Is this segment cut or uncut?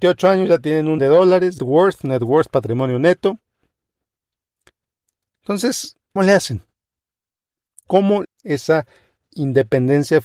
cut